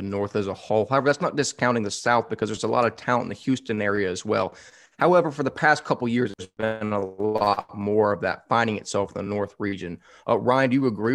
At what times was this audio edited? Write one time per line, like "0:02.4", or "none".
none